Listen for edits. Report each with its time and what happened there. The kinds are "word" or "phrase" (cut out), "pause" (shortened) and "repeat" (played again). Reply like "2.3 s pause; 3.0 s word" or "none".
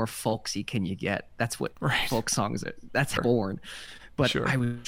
3.2 s word